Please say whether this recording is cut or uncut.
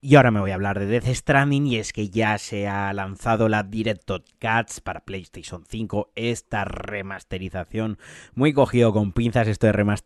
uncut